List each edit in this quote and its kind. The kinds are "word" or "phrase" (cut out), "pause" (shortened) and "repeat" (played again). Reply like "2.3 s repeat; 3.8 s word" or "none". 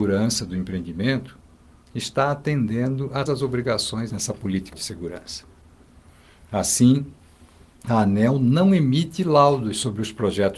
3.3 s word; 4.1 s word; 4.7 s word